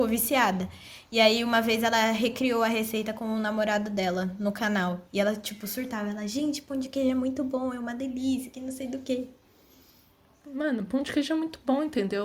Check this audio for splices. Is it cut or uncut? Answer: uncut